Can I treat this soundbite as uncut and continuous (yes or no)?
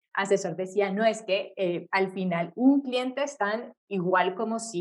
no